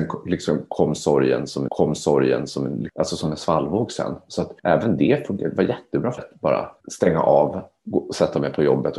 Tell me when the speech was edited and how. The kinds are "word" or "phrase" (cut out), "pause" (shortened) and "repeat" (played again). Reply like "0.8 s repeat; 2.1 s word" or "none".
1.7 s repeat; 4.6 s pause; 6.2 s word; 6.8 s pause